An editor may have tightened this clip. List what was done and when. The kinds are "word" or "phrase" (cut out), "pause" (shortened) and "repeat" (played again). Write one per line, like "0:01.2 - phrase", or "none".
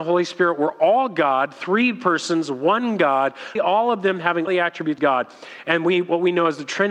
0:03.6 - word
0:04.5 - word
0:05.0 - word